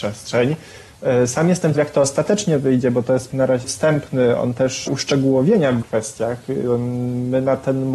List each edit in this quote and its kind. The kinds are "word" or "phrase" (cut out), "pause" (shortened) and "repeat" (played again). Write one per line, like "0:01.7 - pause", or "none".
0:01.7 - word
0:03.3 - word
0:03.6 - word
0:04.9 - word
0:05.8 - word

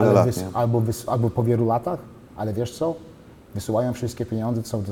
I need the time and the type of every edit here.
none

